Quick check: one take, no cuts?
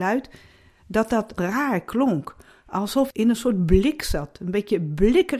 no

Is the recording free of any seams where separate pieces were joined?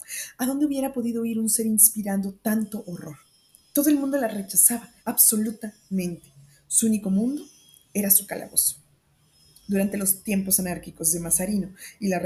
no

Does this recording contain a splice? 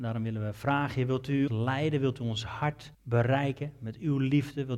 yes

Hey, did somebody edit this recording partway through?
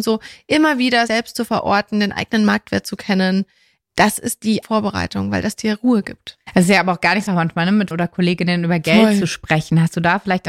yes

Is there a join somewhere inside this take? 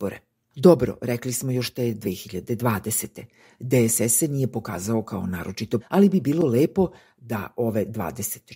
yes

